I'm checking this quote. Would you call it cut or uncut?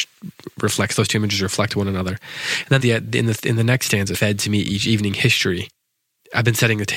cut